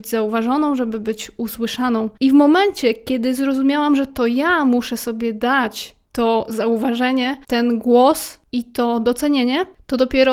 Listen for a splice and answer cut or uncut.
cut